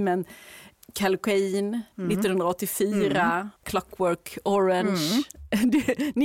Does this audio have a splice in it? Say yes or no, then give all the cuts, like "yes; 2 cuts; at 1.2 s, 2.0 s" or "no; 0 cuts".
yes; 1 cut; at 3.6 s